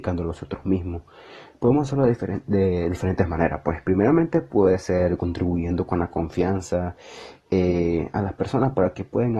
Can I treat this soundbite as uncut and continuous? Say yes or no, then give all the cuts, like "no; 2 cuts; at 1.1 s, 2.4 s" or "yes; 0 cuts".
yes; 0 cuts